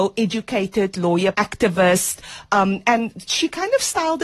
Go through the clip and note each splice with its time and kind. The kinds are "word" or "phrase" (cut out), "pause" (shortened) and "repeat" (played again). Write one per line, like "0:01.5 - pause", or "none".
0:01.3 - phrase

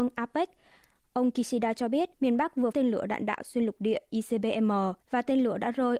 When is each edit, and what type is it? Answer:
0:02.1 - pause
0:02.7 - word
0:05.0 - pause

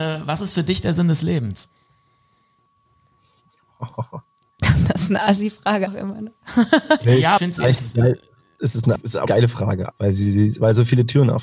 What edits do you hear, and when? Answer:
0:05.9 - word
0:07.4 - phrase
0:08.9 - word
0:09.3 - word
0:09.9 - word

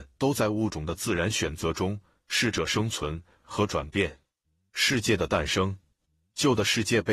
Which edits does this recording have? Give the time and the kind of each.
none

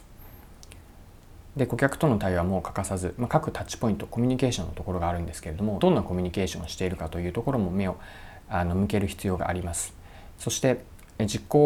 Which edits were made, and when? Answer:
0:05.8 - phrase

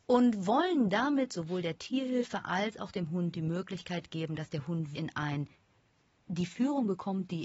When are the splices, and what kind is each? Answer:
0:04.9 - word
0:06.2 - word

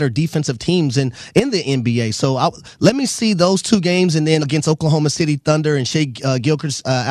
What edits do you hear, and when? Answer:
0:04.4 - word

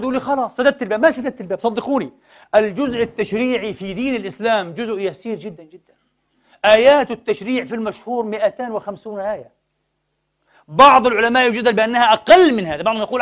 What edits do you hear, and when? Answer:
0:05.6 - word

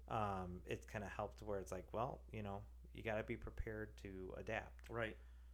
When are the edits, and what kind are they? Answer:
none

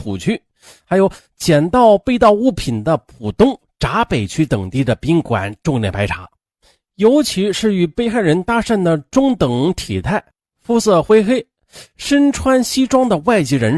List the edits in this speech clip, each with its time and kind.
none

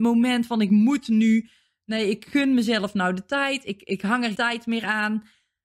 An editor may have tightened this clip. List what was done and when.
0:04.3 - word

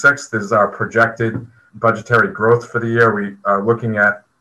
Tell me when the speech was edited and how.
0:01.7 - word

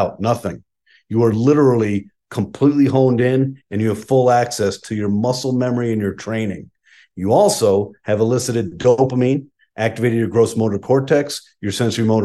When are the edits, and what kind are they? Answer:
none

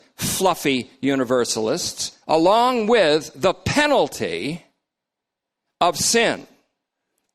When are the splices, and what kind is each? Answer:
0:02.2 - pause

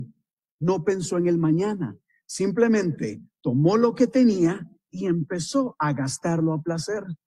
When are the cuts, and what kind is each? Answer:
none

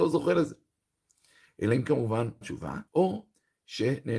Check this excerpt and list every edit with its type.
0:01.8 - word
0:02.4 - word
0:02.9 - pause

